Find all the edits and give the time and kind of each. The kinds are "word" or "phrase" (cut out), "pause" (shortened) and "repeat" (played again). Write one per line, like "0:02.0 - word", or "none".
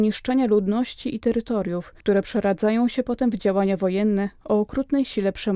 none